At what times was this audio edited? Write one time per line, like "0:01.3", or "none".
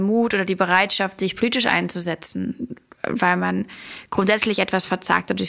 none